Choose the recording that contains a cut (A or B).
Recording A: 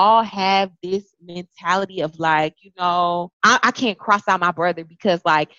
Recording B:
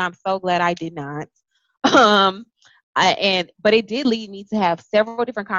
A